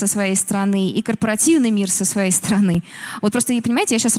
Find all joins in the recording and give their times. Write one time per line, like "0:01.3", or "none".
none